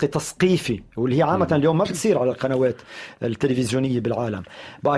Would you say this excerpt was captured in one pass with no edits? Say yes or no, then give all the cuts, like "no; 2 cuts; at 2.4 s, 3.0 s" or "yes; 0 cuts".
yes; 0 cuts